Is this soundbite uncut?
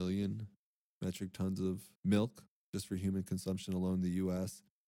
no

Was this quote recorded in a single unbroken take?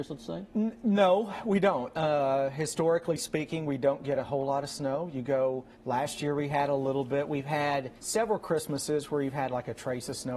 no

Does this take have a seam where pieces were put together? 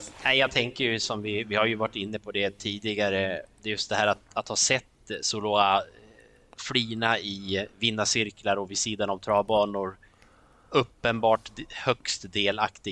no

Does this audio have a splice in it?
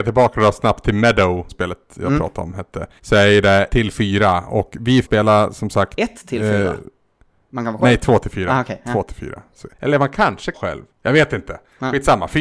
yes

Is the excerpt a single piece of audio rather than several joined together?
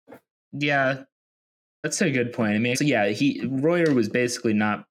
no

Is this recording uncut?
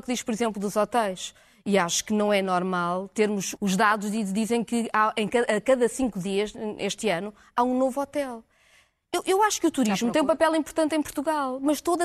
no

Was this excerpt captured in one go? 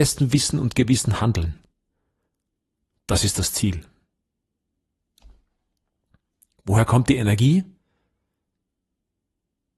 yes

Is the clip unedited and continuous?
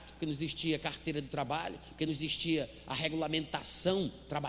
yes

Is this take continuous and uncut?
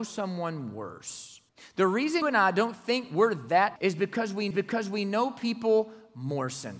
no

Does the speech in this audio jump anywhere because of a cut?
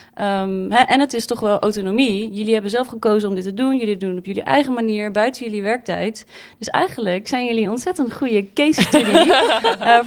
no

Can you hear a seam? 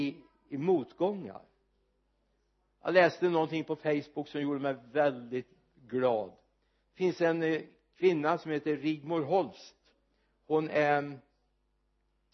no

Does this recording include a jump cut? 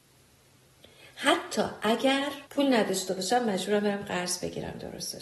yes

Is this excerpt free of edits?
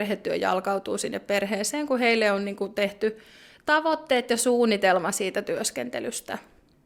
yes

